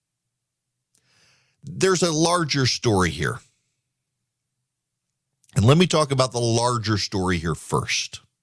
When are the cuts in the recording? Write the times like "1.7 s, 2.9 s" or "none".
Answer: none